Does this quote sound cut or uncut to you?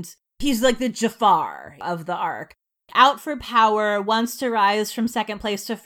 uncut